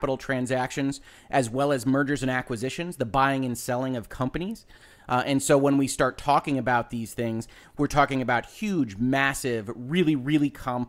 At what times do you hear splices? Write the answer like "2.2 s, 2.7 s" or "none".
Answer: none